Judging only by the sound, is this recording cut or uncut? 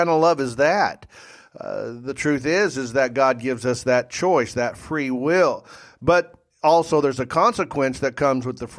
uncut